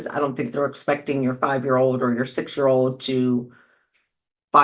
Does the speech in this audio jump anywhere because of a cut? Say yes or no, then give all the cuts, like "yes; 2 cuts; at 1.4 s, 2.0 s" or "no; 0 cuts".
no; 0 cuts